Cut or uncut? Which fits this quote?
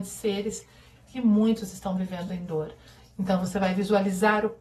uncut